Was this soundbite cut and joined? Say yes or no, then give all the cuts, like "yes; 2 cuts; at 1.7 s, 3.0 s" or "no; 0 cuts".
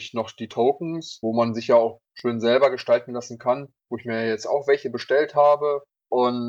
yes; 1 cut; at 2.1 s